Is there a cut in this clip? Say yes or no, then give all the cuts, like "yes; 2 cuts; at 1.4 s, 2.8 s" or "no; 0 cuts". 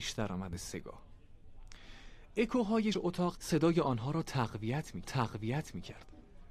yes; 3 cuts; at 2.9 s, 3.3 s, 5.0 s